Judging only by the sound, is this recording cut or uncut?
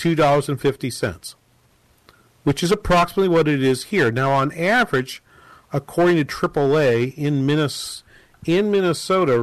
uncut